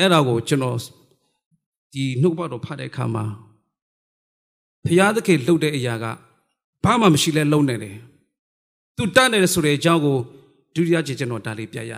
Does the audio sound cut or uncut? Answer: uncut